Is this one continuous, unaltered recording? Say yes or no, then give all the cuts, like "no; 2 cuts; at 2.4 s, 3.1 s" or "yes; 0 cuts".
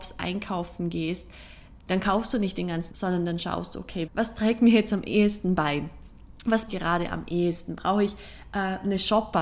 no; 3 cuts; at 2.9 s, 4.1 s, 6.7 s